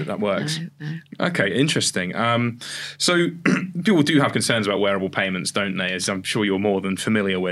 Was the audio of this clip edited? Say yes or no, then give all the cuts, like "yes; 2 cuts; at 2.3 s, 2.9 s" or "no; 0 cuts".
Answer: no; 0 cuts